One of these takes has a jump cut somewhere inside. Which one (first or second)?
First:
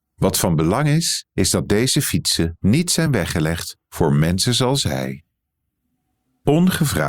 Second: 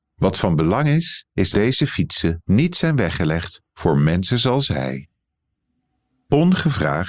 second